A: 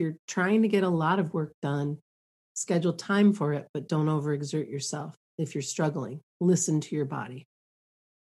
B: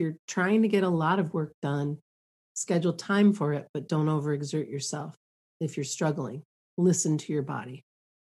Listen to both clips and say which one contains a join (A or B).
A